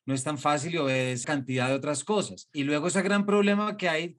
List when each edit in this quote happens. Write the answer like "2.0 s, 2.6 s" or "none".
1.2 s